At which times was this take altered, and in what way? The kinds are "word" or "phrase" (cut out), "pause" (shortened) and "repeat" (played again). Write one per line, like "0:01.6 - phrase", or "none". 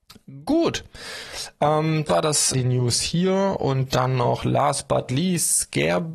0:02.1 - word
0:02.5 - phrase
0:05.1 - word